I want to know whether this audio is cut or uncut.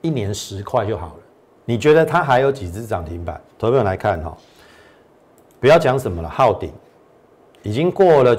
uncut